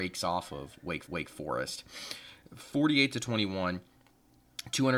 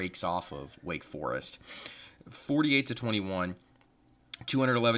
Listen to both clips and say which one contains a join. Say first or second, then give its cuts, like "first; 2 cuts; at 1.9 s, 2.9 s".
first; 1 cut; at 1.1 s